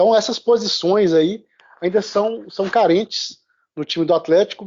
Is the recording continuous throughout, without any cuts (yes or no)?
yes